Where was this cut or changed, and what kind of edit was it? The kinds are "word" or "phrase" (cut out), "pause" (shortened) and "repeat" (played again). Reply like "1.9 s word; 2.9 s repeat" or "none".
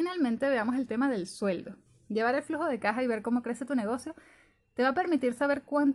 1.9 s pause